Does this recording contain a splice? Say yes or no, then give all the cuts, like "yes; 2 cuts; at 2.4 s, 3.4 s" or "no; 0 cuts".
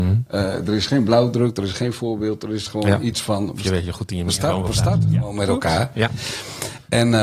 no; 0 cuts